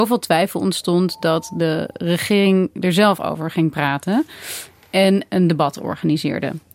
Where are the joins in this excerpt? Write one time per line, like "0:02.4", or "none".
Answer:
none

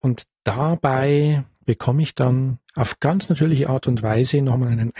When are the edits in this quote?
0:01.5
0:02.6

